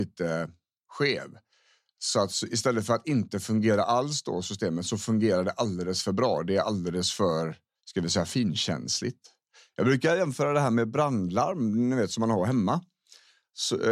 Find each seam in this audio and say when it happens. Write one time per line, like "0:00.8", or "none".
0:07.8

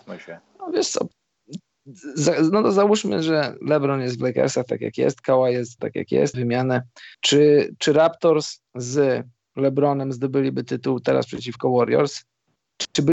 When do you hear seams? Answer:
0:03.6
0:05.8
0:06.3
0:07.1
0:08.7

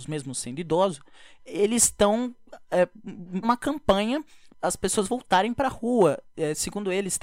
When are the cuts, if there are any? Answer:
0:01.5
0:03.4
0:04.5

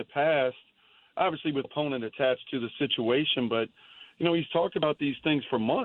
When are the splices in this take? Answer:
0:01.6

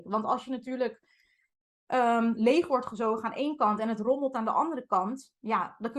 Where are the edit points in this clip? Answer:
none

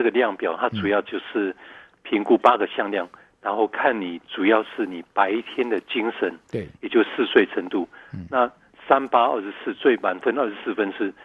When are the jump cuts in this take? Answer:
none

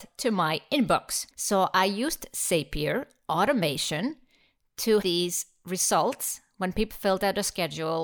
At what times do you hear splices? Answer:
0:01.3
0:05.0
0:06.9

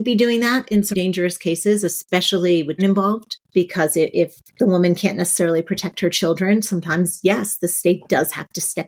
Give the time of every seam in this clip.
0:00.9
0:02.8
0:03.4
0:04.5

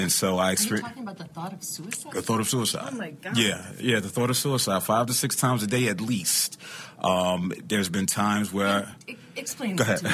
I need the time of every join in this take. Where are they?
none

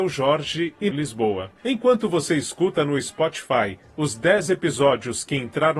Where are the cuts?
0:00.9
0:01.6

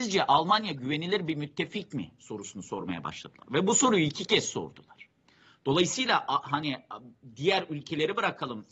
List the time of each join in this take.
none

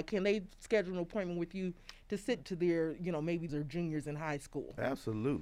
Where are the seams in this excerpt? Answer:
0:02.4
0:03.5

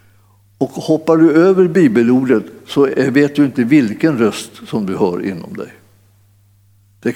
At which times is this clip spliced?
none

